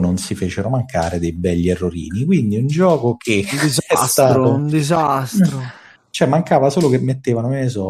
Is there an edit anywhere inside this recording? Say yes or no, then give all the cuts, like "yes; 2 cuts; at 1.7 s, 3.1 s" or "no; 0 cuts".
no; 0 cuts